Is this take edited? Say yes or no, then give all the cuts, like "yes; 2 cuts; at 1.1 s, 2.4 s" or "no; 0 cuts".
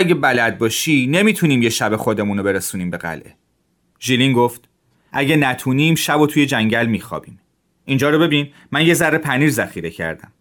no; 0 cuts